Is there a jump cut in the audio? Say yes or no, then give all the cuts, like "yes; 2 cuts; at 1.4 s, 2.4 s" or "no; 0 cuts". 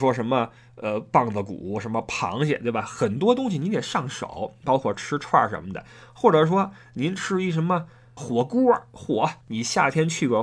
yes; 2 cuts; at 8.2 s, 9.4 s